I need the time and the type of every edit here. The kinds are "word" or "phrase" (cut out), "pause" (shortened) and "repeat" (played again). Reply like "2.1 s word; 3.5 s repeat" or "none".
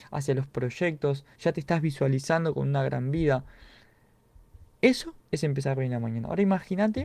1.3 s pause